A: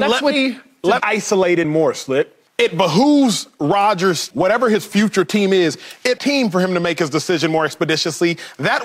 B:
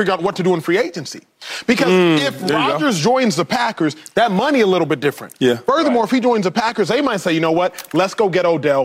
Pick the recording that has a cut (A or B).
A